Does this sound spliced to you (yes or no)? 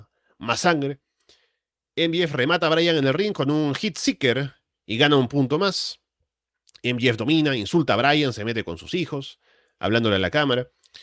no